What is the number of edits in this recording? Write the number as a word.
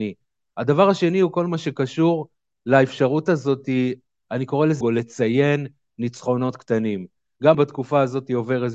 two